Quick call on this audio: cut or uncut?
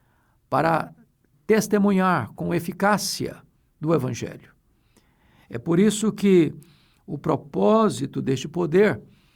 uncut